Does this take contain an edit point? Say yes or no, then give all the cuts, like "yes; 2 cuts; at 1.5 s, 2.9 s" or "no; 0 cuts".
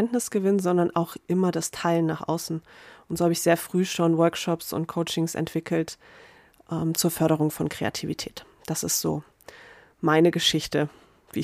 no; 0 cuts